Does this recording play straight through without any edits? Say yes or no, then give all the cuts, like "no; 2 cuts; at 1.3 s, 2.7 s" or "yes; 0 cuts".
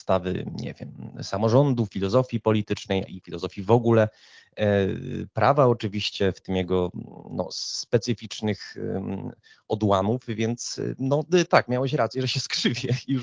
yes; 0 cuts